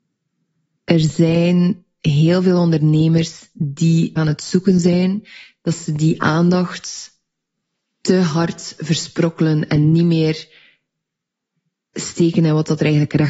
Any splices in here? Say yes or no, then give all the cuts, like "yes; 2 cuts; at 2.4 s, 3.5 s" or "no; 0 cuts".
yes; 1 cut; at 4.2 s